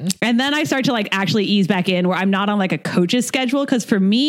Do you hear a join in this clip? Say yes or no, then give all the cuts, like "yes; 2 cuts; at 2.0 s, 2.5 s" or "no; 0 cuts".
no; 0 cuts